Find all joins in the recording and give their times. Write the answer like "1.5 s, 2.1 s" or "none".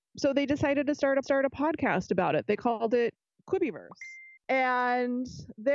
1.2 s, 4.4 s